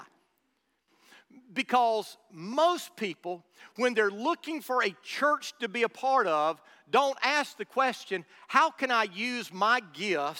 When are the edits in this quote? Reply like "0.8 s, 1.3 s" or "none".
none